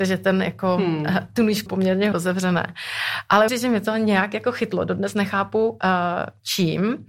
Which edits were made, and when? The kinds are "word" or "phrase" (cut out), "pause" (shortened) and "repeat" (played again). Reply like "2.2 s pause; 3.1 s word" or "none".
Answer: 1.7 s word; 2.1 s word; 3.5 s word

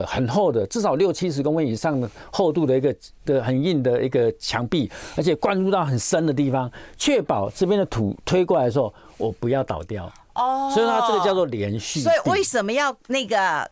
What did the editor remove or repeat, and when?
none

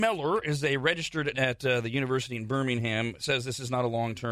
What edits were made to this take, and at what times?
1.3 s word

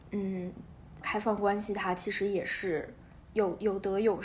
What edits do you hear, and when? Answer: 1.0 s word; 3.2 s pause

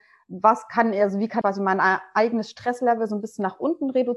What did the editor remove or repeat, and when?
1.4 s word

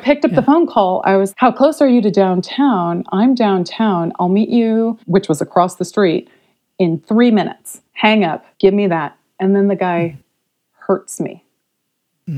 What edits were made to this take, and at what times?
1.3 s word; 5.0 s pause; 7.9 s pause; 8.5 s pause

